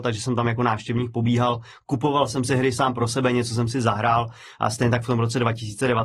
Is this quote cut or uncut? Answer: uncut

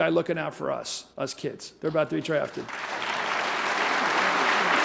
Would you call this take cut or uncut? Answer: cut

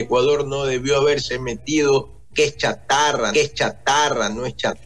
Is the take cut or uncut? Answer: cut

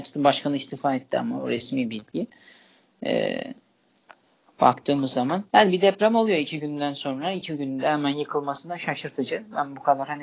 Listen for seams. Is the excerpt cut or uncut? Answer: cut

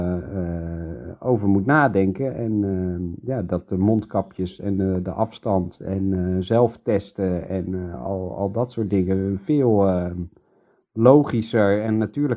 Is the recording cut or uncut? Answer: uncut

